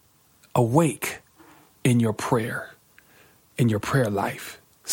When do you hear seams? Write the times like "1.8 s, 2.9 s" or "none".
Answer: none